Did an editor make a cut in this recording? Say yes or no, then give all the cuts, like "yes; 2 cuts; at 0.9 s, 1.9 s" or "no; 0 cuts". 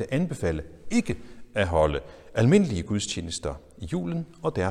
no; 0 cuts